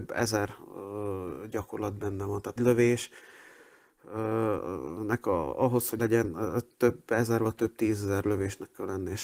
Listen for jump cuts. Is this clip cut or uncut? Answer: cut